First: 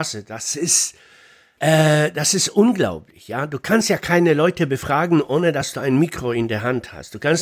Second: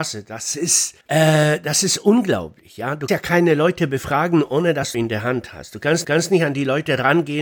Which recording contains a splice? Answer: second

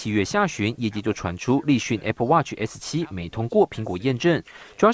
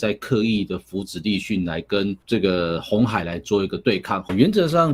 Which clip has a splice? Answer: second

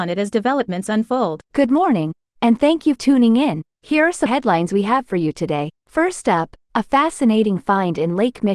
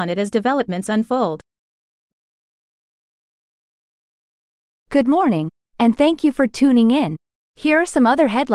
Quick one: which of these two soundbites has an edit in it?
first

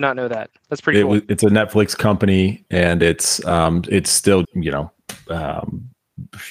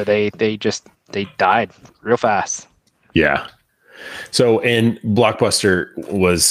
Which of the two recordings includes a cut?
first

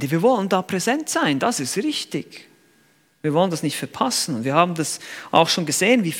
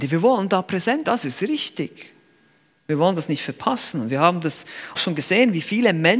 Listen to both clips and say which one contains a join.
second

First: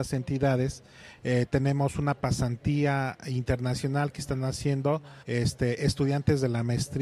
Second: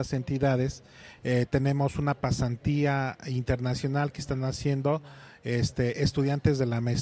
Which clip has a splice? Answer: first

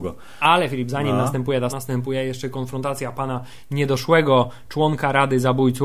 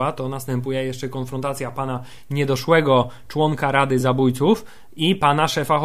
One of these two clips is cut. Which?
first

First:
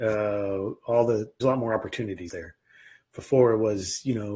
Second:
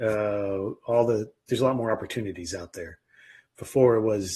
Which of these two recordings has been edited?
first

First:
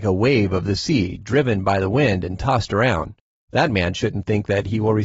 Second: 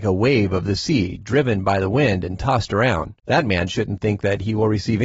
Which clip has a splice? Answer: second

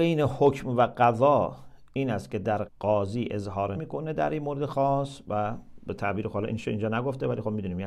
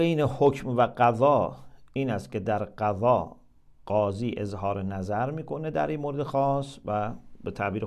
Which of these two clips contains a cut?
first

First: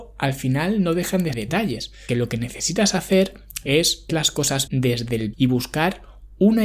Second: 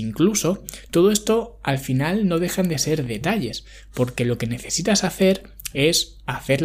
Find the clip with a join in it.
first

